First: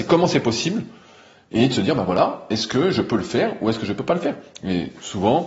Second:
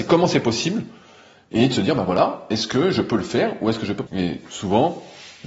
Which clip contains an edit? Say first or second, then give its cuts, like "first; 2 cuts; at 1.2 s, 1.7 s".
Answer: second; 1 cut; at 4.1 s